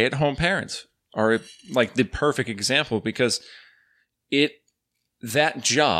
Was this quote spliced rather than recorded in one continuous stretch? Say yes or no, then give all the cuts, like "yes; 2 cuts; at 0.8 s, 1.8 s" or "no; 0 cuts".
no; 0 cuts